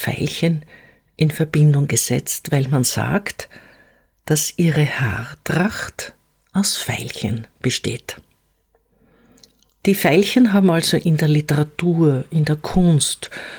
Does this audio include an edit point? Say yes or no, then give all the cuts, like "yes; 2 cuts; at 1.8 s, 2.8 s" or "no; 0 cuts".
no; 0 cuts